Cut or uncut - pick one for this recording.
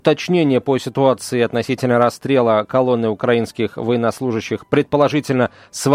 uncut